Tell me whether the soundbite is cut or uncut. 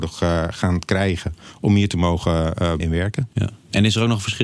cut